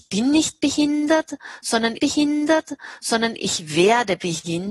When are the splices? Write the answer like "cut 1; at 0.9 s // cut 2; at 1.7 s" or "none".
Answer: cut 1; at 2.0 s